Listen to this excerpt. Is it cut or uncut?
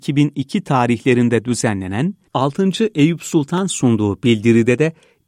cut